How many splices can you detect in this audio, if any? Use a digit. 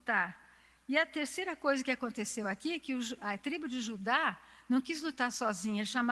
0